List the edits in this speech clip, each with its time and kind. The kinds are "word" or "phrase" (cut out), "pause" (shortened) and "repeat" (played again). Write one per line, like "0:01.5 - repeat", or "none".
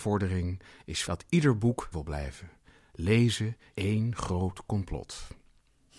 0:01.0 - word
0:01.9 - word
0:03.7 - word